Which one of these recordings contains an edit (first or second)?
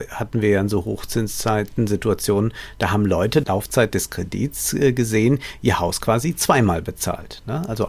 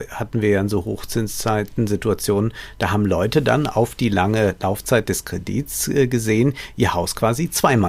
first